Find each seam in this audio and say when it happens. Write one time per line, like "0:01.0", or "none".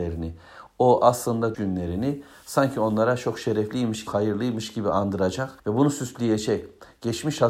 0:01.5
0:04.1
0:05.6